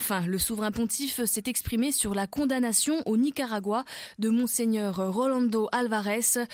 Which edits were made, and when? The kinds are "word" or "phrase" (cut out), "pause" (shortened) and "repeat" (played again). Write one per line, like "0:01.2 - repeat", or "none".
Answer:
none

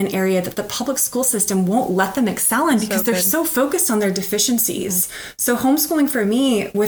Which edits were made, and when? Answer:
none

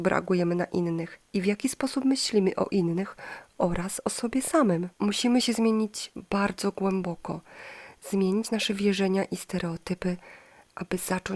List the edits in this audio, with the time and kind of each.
0:04.9 - pause

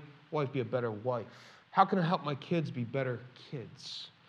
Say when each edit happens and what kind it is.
0:01.6 - pause

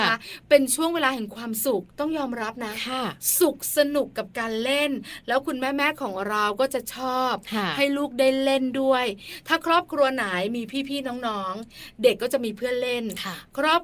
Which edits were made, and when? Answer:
0:01.9 - pause

